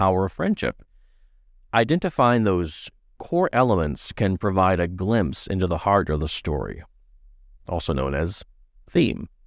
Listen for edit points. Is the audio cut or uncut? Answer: uncut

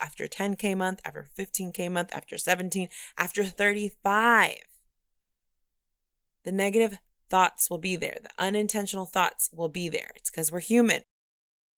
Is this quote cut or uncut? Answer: uncut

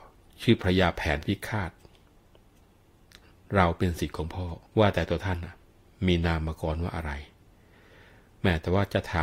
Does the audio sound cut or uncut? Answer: cut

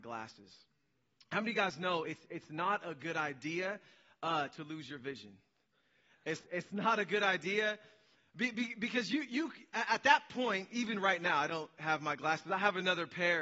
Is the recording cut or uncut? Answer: uncut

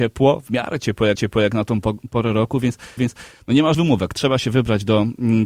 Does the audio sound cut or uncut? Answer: cut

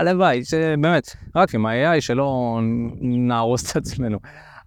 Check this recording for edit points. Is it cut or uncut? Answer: cut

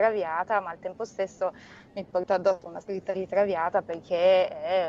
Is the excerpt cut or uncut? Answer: uncut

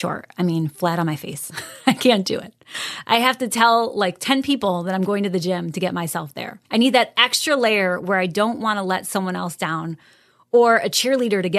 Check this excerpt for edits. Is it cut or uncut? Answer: cut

